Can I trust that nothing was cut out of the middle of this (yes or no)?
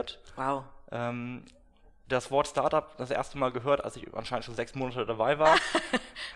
yes